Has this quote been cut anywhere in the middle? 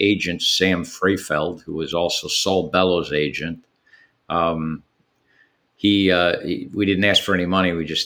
no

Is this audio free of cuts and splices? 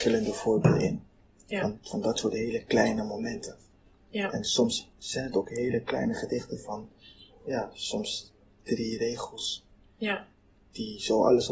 yes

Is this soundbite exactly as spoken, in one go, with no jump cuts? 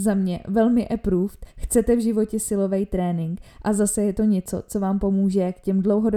no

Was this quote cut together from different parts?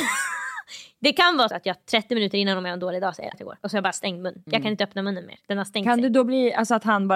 yes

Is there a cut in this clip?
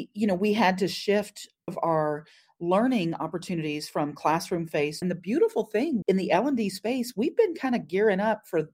yes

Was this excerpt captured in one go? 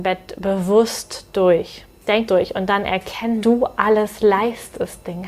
no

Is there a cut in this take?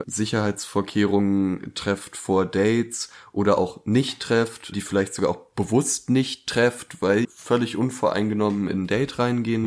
yes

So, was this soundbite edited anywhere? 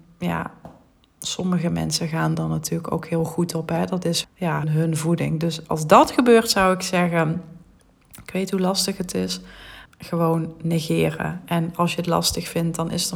yes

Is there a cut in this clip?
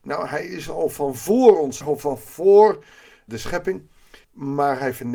yes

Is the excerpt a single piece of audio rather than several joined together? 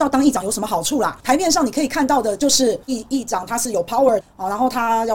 no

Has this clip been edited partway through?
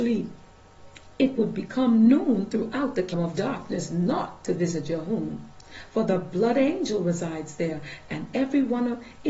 yes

